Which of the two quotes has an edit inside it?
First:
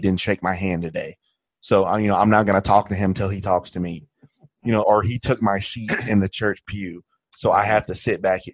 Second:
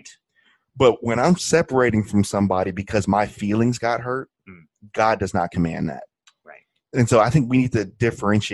first; 1 cut; at 4.8 s

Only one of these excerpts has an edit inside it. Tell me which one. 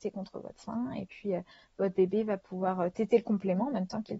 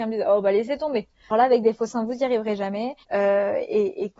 second; 2 cuts; at 1.3 s, 3.0 s

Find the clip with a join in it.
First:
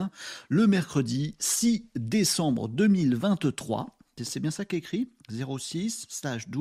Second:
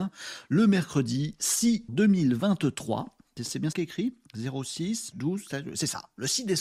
second; 3 cuts; at 1.9 s, 3.7 s, 5.1 s

